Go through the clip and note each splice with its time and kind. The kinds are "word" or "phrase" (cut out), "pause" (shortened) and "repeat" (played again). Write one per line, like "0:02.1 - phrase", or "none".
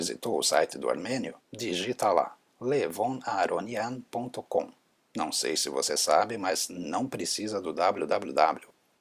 0:01.4 - pause